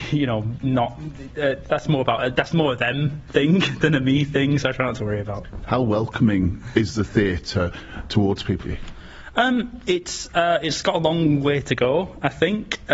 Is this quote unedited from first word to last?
no; 1 cut; at 8.6 s

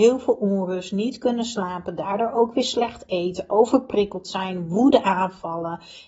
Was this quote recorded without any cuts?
yes; 0 cuts

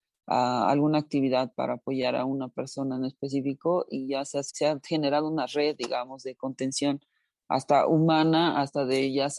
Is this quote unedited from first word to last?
no; 1 cut; at 4.5 s

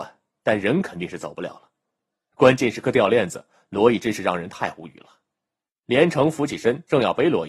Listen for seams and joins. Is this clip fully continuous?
yes; 0 cuts

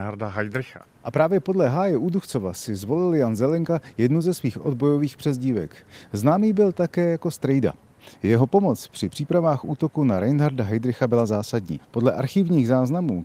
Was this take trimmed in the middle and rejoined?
no; 0 cuts

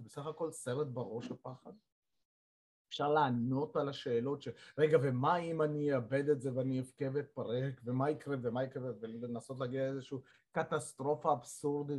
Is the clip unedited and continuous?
yes; 0 cuts

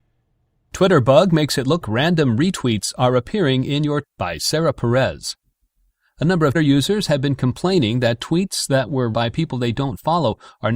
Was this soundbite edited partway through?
yes; 4 cuts; at 1.8 s, 4.0 s, 6.5 s, 9.1 s

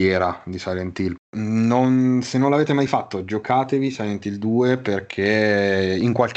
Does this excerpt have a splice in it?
yes; 1 cut; at 1.2 s

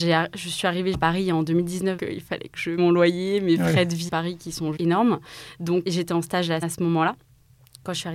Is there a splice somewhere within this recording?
yes; 7 cuts; at 0.9 s, 2.0 s, 2.8 s, 4.1 s, 4.8 s, 5.8 s, 6.6 s

